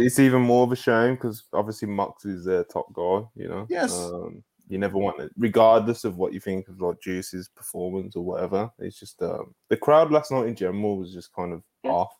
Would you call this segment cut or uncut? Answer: uncut